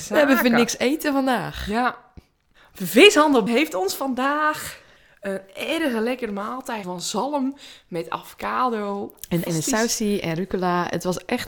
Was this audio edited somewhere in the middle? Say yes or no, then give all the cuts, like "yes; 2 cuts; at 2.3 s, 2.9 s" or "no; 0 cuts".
yes; 4 cuts; at 3.5 s, 5.0 s, 6.8 s, 9.5 s